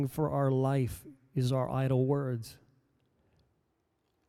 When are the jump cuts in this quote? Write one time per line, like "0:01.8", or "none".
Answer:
none